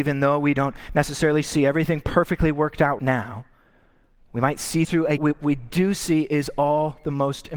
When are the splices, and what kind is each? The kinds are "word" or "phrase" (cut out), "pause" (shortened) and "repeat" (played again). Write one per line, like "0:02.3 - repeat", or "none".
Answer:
0:03.0 - word
0:04.8 - word
0:05.2 - phrase